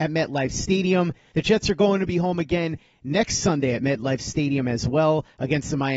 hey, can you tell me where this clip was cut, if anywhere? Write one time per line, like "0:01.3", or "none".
none